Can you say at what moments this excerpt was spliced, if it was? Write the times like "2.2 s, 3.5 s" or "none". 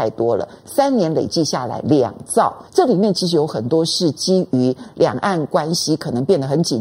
2.7 s